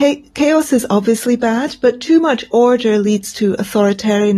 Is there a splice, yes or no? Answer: no